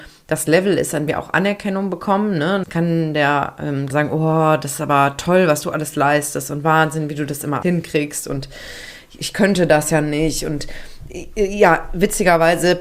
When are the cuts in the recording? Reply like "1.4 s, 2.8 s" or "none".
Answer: 1.1 s, 2.6 s, 3.9 s, 7.6 s